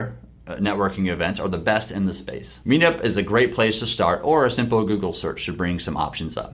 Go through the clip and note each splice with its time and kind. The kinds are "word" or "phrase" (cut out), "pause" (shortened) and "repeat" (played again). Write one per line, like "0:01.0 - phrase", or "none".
none